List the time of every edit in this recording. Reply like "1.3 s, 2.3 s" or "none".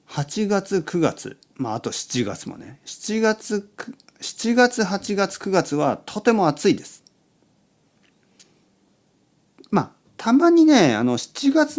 none

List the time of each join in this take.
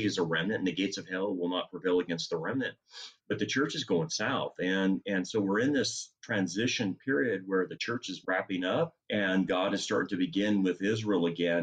3.2 s, 6.2 s, 9.0 s

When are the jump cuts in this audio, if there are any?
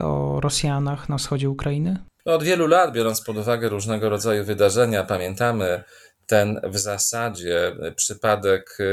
none

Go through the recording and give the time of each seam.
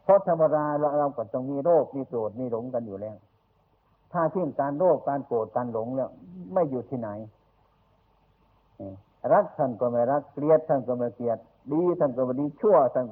none

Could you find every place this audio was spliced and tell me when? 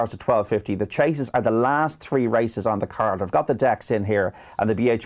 none

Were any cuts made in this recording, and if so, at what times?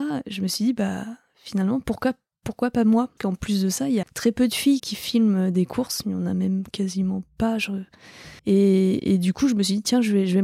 3.2 s, 4.0 s, 4.8 s, 8.4 s

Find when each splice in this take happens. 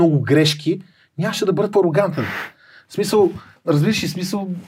1.7 s, 3.6 s

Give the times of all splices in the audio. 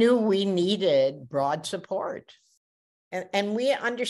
none

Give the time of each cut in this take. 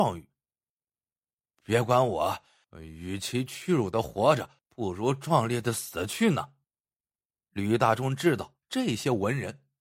2.6 s, 4.6 s, 6.6 s, 8.6 s

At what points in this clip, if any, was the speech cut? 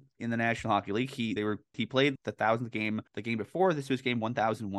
1.4 s, 1.7 s, 2.2 s, 3.1 s

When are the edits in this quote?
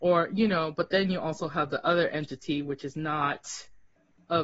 none

